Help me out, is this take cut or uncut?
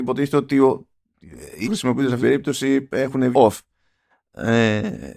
cut